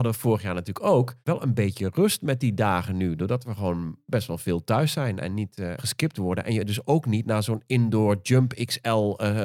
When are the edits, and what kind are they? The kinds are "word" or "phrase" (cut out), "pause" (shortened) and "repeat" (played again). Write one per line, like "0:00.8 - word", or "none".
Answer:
0:01.2 - pause
0:05.8 - phrase

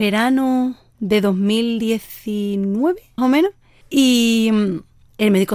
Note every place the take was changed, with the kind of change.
0:03.2 - word

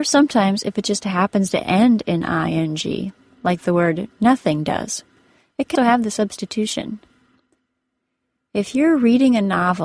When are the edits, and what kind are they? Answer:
0:05.8 - word

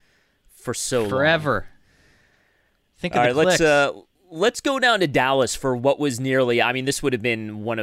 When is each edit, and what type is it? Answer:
none

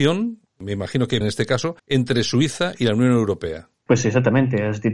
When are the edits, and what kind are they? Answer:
0:01.2 - word
0:01.8 - pause

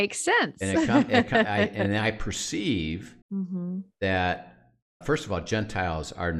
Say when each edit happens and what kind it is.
0:03.2 - pause
0:05.0 - word

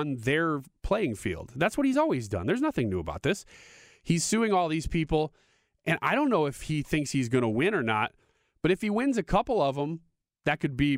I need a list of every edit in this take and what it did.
none

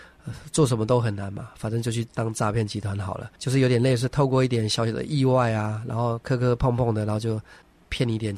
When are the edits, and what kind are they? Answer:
0:03.4 - pause

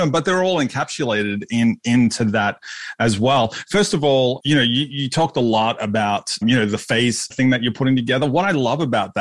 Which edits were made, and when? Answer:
0:04.4 - word
0:06.4 - word
0:07.3 - word

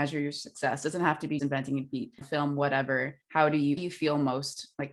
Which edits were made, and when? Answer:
0:01.4 - word
0:02.2 - phrase
0:03.2 - pause
0:03.8 - word

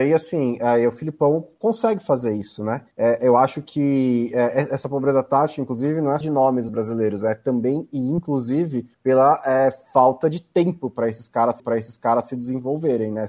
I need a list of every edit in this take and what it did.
0:02.9 - pause
0:06.2 - word
0:06.7 - phrase
0:08.9 - pause
0:11.6 - repeat

